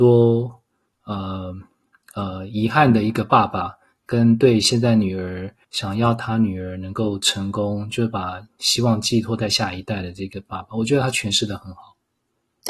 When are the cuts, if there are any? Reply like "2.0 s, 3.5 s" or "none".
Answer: 5.6 s